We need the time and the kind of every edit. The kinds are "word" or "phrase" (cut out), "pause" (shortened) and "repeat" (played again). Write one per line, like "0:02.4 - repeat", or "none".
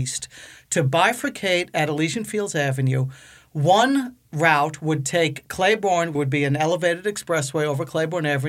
0:06.2 - word